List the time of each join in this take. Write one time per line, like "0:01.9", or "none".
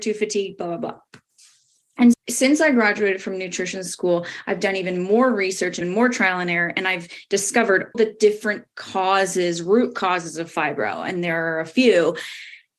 0:02.1
0:05.8
0:07.9